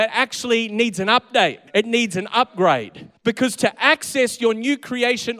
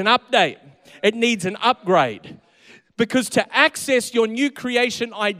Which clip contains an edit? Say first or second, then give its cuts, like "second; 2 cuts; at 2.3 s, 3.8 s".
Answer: first; 2 cuts; at 1.7 s, 3.2 s